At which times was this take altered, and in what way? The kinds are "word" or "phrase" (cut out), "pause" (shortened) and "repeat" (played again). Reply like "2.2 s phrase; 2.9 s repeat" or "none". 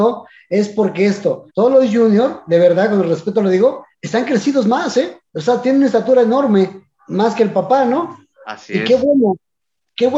1.5 s pause; 3.9 s pause; 5.3 s pause; 8.3 s pause